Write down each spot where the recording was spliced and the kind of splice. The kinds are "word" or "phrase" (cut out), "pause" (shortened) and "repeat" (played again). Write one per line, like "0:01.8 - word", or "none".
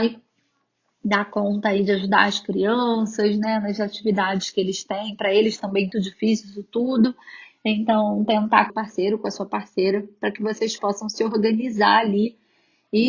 0:05.9 - word
0:08.7 - phrase